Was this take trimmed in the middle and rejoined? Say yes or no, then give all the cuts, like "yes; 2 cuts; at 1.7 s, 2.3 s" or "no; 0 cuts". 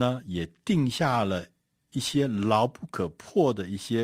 no; 0 cuts